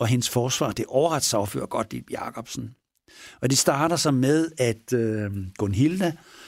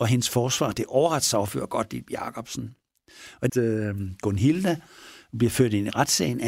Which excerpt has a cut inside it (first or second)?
second